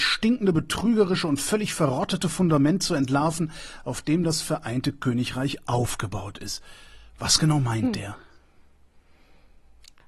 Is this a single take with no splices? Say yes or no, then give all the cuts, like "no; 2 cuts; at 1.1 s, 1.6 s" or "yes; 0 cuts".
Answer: yes; 0 cuts